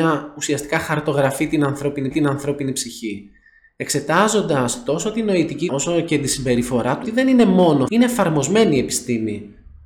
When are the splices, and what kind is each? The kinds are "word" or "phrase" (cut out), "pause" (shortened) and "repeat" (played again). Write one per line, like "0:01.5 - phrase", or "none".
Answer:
0:02.1 - repeat
0:05.7 - word
0:07.0 - phrase
0:07.9 - word